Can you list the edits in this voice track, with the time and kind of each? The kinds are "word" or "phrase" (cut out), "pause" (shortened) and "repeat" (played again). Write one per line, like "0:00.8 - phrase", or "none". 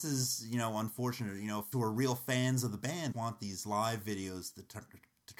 0:01.7 - word
0:03.1 - word

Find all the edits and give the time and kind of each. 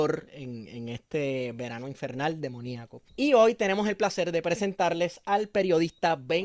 0:03.1 - pause

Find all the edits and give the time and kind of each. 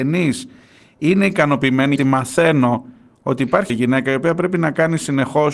0:02.0 - word
0:03.7 - word

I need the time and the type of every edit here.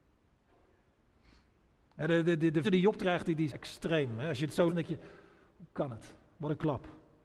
0:02.6 - word
0:03.0 - word
0:03.5 - word
0:04.7 - word

